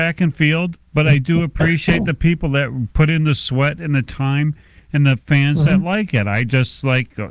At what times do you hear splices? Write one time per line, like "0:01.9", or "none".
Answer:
none